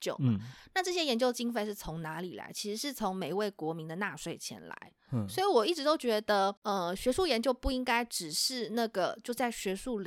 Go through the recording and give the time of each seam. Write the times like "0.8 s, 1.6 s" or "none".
6.6 s